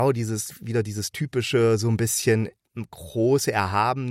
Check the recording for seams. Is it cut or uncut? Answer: cut